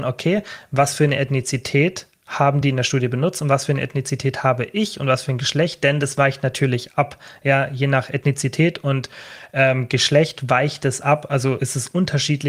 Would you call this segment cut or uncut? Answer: uncut